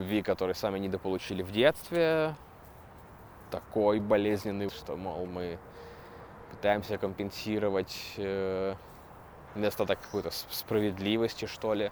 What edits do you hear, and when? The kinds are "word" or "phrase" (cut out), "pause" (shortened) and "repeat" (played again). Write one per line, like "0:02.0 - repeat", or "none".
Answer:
0:04.7 - word
0:09.5 - phrase